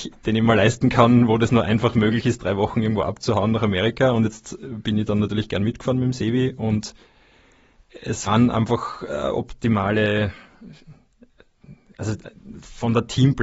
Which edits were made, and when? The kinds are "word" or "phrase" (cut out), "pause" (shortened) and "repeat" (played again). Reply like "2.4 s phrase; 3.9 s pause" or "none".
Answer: 8.3 s phrase